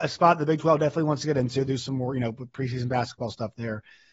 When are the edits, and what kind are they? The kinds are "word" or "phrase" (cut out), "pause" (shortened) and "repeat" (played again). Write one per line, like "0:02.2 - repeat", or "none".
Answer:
0:01.7 - word